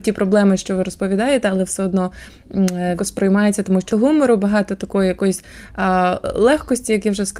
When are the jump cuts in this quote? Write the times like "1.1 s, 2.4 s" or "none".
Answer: 3.0 s, 3.9 s